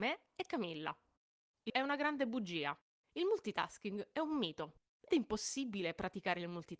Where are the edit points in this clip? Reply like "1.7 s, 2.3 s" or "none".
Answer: 1.7 s, 5.1 s